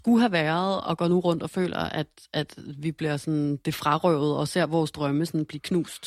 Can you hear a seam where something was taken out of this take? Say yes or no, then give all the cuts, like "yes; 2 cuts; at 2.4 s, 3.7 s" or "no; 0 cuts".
no; 0 cuts